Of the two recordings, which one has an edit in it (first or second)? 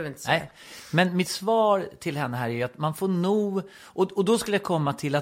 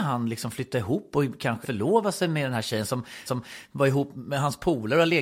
second